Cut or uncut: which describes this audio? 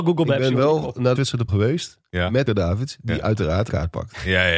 cut